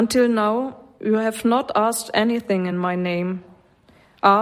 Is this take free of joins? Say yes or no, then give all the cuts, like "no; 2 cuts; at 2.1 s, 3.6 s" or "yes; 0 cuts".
yes; 0 cuts